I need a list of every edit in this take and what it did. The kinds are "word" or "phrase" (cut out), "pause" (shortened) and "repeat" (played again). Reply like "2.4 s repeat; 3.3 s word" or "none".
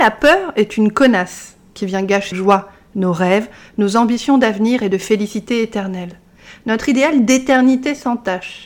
2.3 s word